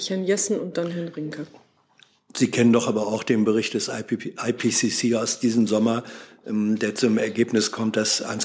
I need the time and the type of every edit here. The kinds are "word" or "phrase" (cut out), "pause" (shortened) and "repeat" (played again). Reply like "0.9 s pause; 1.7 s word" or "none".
none